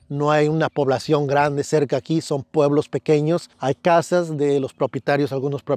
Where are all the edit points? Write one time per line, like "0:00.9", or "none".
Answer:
0:03.5